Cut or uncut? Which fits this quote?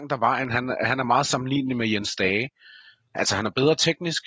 uncut